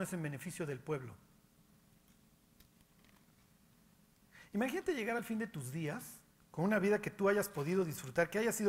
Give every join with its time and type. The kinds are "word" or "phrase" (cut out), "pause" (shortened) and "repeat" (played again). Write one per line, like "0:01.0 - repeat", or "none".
none